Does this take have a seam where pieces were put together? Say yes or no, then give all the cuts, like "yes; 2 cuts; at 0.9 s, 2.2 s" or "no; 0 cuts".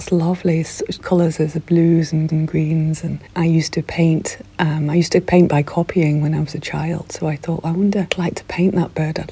yes; 2 cuts; at 1.0 s, 2.3 s